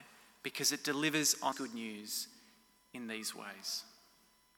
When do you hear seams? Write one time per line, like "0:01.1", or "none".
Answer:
0:01.5